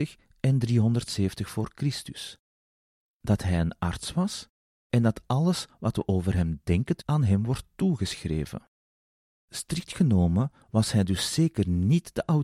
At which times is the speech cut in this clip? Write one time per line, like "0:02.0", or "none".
0:07.0

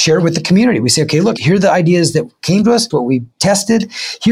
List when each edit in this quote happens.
0:01.4
0:02.9
0:03.3

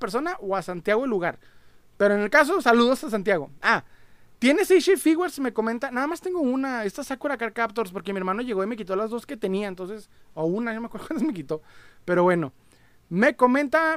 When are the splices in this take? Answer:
none

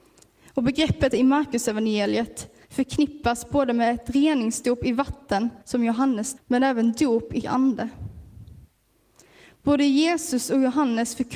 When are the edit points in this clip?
0:01.1
0:02.6
0:05.6
0:06.4
0:07.4

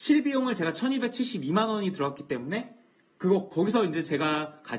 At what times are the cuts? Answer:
none

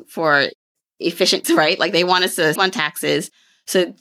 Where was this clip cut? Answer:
0:01.4
0:02.6

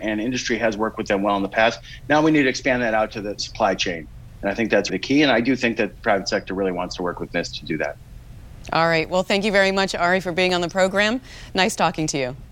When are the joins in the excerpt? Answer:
0:03.4
0:04.9

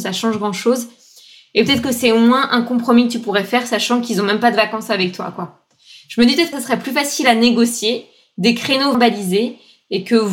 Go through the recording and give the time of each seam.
0:06.5
0:08.9

